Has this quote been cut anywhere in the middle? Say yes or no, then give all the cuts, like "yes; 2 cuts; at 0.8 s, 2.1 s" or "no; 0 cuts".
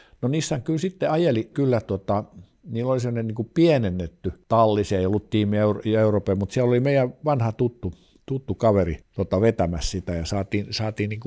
no; 0 cuts